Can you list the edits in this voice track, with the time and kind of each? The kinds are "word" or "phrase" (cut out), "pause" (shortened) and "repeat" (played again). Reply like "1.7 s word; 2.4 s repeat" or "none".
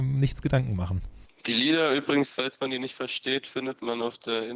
none